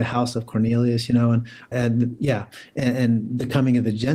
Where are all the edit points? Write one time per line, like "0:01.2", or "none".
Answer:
0:01.7